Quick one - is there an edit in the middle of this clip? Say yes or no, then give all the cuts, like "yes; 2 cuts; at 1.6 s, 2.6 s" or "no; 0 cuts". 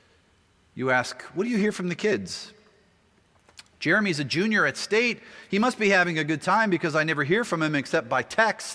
no; 0 cuts